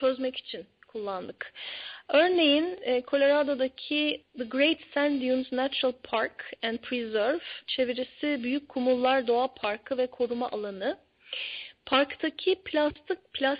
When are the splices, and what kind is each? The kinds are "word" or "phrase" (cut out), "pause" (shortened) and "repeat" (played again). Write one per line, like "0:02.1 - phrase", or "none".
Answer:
0:04.2 - word